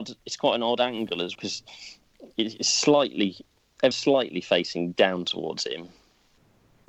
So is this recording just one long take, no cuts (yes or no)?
no